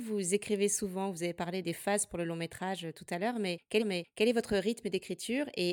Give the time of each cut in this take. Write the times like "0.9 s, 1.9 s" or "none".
1.6 s, 3.8 s

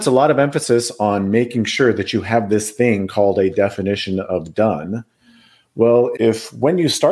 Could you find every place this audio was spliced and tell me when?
6.1 s

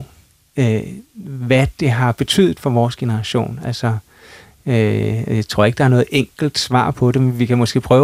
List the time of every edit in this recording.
none

